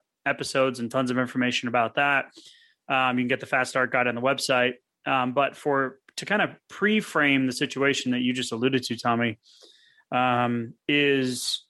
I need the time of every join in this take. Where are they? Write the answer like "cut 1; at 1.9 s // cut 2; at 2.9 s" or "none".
none